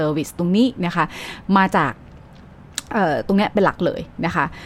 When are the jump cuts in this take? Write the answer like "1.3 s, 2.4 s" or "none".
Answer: none